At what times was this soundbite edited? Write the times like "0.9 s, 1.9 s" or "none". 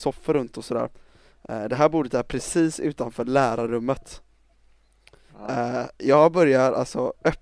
none